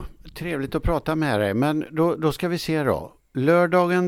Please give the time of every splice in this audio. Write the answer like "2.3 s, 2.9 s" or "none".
none